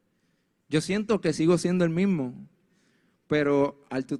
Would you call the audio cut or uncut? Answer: uncut